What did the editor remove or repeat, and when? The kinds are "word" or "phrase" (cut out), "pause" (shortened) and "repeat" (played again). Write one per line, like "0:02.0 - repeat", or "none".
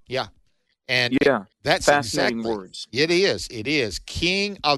0:01.5 - pause